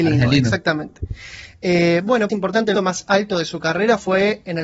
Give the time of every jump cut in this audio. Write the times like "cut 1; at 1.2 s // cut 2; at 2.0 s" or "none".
cut 1; at 2.3 s // cut 2; at 2.7 s // cut 3; at 3.1 s